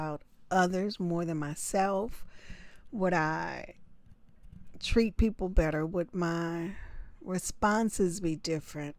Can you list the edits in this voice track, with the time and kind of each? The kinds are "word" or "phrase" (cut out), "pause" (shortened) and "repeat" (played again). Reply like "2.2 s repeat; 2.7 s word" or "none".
none